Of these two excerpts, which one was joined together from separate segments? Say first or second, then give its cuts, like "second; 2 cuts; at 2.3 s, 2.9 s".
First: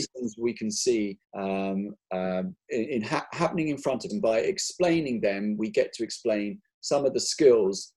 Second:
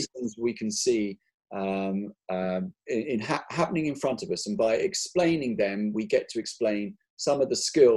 first; 2 cuts; at 1.2 s, 4.1 s